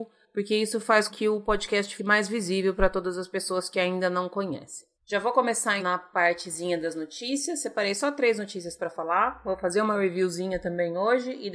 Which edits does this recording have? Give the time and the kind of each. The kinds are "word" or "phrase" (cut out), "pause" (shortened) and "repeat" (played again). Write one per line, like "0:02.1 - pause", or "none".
0:01.1 - word
0:02.0 - word
0:04.9 - pause
0:05.8 - word